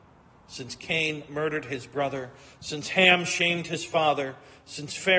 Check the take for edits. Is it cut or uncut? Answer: uncut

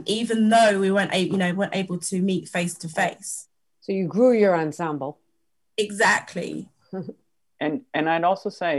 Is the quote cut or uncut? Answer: uncut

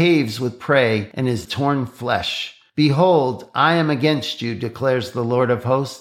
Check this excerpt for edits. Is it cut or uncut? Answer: cut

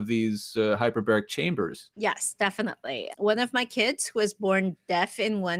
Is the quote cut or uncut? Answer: cut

